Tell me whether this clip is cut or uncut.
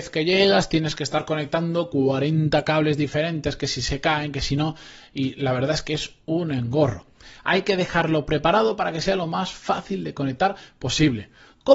uncut